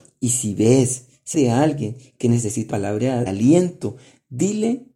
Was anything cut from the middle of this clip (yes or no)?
yes